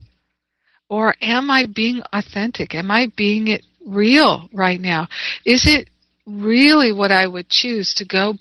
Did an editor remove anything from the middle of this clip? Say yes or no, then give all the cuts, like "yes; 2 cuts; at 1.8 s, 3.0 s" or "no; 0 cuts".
no; 0 cuts